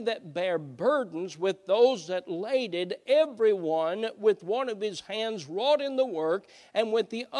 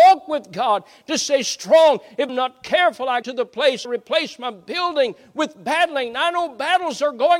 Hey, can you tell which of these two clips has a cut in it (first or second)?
second